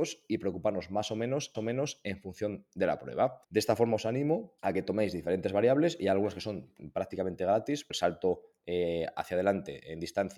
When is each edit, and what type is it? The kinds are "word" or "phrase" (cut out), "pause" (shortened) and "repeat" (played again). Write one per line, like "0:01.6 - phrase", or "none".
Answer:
0:01.5 - repeat
0:03.4 - pause
0:04.6 - pause
0:07.9 - word